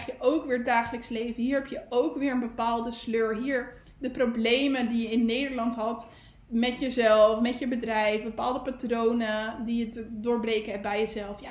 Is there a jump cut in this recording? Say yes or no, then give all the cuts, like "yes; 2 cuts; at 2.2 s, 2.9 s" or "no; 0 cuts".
no; 0 cuts